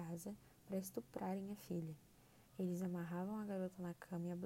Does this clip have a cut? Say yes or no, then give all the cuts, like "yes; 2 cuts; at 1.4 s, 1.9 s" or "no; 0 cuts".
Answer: yes; 1 cut; at 2.5 s